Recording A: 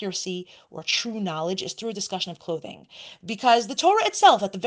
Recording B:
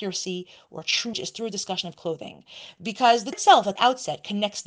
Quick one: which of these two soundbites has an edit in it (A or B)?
B